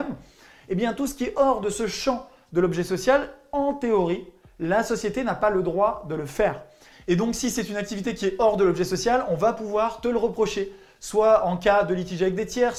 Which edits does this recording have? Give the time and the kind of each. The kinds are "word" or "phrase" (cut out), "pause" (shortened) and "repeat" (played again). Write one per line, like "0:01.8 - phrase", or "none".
none